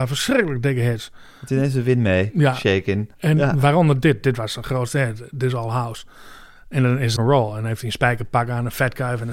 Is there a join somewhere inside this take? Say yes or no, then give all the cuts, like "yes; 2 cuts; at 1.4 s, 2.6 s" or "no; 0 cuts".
yes; 2 cuts; at 3.1 s, 7.2 s